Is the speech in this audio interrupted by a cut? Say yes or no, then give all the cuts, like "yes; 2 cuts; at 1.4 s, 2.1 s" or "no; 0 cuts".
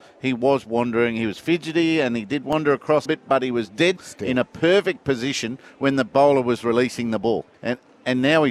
yes; 3 cuts; at 3.1 s, 4.0 s, 7.5 s